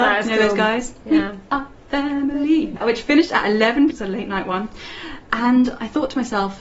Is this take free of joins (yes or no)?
no